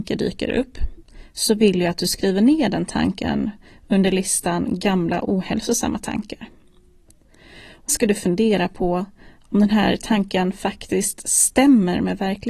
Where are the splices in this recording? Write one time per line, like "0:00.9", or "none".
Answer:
0:07.9